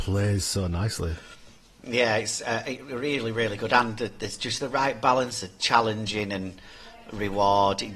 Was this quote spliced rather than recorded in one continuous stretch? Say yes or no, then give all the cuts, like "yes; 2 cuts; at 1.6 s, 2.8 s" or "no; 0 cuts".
no; 0 cuts